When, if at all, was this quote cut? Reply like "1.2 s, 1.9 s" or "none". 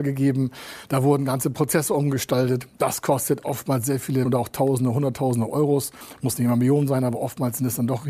4.2 s